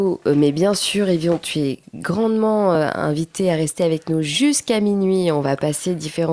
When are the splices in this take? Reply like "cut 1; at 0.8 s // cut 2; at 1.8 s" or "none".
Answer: none